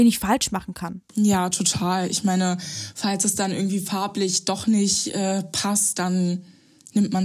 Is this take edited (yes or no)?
yes